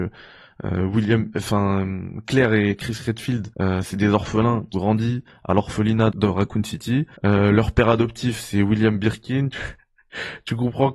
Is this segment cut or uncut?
cut